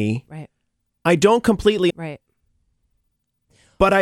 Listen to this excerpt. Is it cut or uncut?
cut